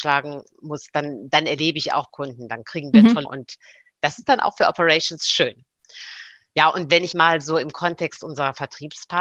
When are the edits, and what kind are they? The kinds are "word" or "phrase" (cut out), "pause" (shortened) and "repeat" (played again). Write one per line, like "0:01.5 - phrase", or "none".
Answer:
0:02.1 - word
0:03.2 - word
0:07.1 - word